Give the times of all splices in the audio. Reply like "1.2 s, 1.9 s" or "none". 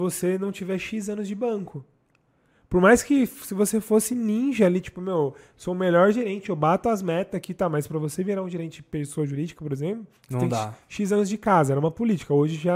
10.2 s